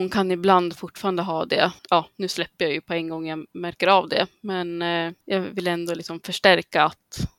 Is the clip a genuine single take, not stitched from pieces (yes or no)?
no